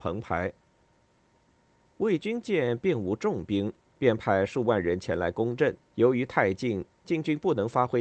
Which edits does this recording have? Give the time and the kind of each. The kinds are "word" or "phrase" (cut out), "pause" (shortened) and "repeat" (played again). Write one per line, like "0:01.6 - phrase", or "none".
0:05.8 - pause